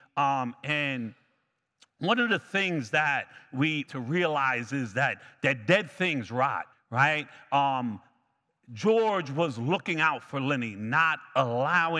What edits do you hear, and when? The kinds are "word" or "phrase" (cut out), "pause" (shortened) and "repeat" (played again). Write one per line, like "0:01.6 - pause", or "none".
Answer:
0:03.9 - phrase
0:06.7 - pause